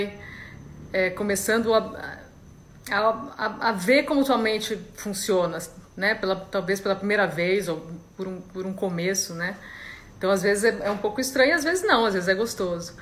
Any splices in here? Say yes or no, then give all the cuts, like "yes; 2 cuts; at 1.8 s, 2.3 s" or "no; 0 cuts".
no; 0 cuts